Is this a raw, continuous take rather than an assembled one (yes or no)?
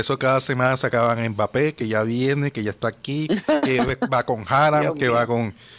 yes